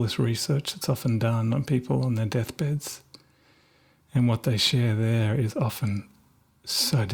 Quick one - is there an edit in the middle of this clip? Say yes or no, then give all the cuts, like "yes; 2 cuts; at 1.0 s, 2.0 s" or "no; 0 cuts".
no; 0 cuts